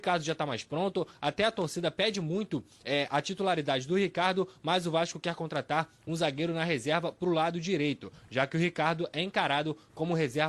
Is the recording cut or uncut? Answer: uncut